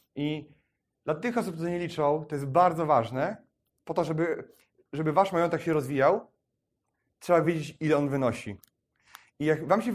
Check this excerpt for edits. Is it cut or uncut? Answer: uncut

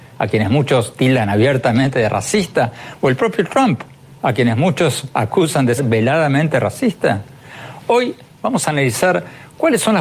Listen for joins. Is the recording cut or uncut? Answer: cut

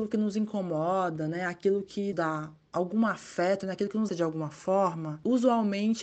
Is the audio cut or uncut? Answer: cut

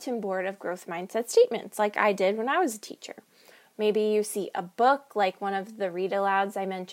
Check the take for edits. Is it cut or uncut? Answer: uncut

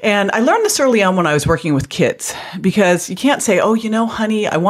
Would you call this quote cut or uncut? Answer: uncut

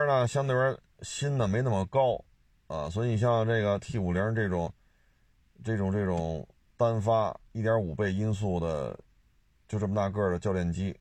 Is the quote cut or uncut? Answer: uncut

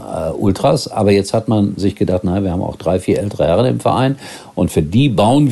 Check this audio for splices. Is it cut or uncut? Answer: uncut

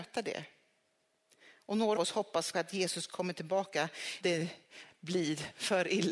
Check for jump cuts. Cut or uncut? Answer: cut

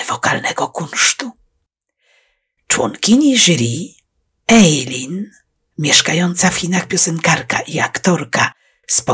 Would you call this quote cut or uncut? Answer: uncut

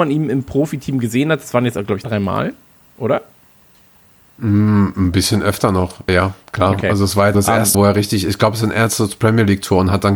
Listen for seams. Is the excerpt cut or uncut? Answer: cut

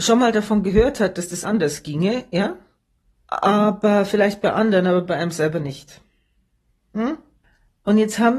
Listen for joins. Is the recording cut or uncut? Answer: cut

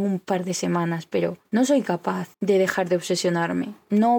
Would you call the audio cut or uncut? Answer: cut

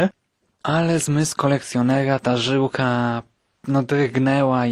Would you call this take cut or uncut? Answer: uncut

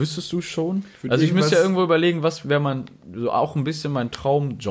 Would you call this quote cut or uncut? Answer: cut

